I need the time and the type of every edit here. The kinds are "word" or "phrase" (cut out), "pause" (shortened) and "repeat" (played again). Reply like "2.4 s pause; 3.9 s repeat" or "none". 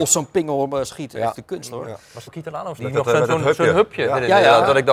1.3 s phrase; 2.3 s word; 2.8 s word